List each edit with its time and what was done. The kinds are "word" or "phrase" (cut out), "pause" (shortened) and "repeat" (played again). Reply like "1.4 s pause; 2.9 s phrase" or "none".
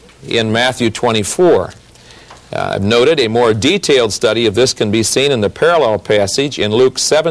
none